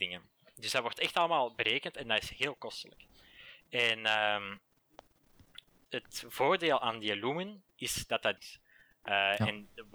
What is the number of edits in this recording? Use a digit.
2